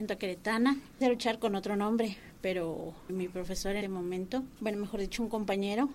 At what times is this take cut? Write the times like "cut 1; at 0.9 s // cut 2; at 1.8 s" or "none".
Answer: cut 1; at 1.0 s // cut 2; at 3.1 s // cut 3; at 3.8 s // cut 4; at 4.5 s